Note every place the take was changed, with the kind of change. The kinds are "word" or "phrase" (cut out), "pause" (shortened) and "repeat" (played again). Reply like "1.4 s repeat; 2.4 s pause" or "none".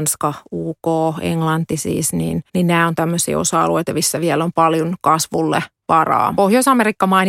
2.5 s pause; 6.3 s phrase